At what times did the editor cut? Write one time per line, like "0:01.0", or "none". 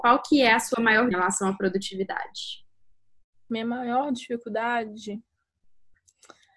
0:01.1

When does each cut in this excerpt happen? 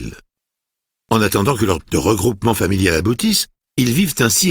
0:01.8

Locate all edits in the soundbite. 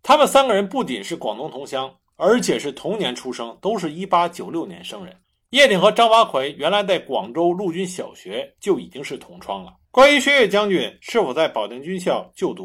0:05.2
0:09.8

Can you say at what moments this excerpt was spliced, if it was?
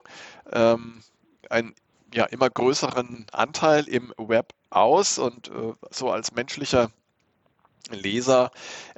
none

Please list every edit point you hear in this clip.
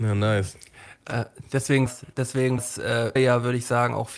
0:01.9
0:02.6
0:03.2

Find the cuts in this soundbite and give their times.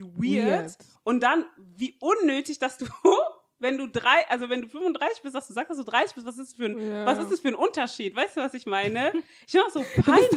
none

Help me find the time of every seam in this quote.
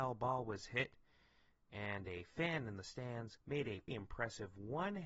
0:03.4
0:03.9

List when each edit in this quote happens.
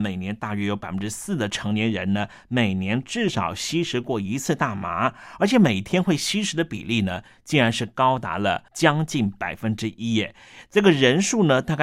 0:08.7

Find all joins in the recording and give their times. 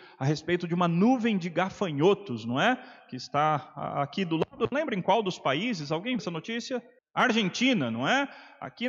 0:04.7
0:06.2
0:07.0

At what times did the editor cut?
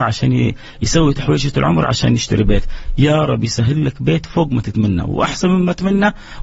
none

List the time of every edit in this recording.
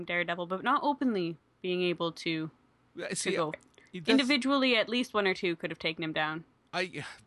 0:03.5

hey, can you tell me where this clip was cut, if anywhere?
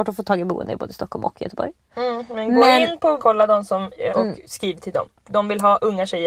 0:03.2
0:04.1

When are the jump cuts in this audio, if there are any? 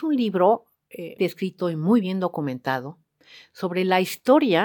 0:01.2

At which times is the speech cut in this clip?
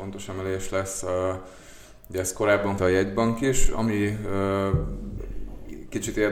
0:02.8

